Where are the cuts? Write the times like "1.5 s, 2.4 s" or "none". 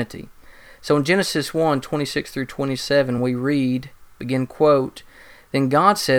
none